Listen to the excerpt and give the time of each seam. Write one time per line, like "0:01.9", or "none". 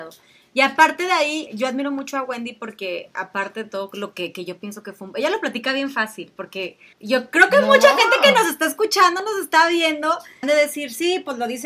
0:01.5
0:06.9
0:10.4